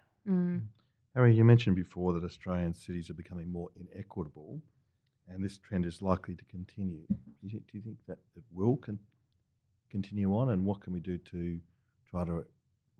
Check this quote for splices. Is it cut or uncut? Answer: uncut